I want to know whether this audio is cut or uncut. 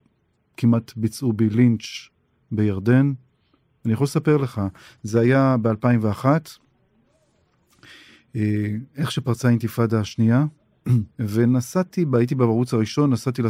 cut